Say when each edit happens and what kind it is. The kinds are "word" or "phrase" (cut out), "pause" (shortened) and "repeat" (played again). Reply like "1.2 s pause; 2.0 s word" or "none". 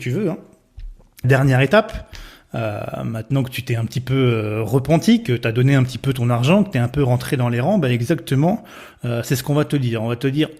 1.2 s phrase

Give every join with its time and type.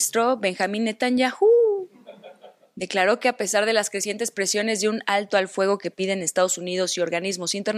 none

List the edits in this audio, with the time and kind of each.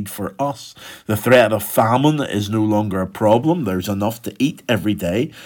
none

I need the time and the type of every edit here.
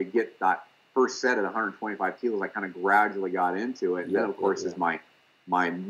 none

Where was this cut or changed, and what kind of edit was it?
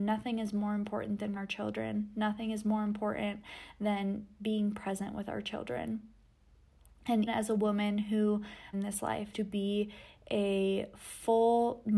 1.4 s word; 7.3 s word; 8.7 s phrase; 9.3 s word

